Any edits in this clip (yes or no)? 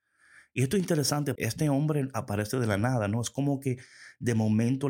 yes